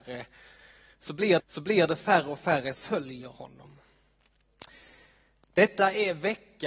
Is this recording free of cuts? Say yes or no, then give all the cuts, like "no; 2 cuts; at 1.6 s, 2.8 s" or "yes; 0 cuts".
no; 2 cuts; at 1.4 s, 2.7 s